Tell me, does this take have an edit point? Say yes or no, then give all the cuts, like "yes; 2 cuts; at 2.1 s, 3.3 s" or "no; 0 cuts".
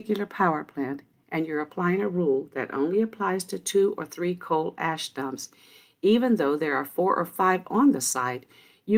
no; 0 cuts